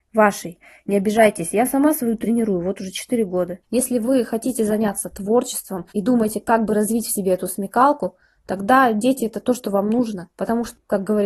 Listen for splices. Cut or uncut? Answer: cut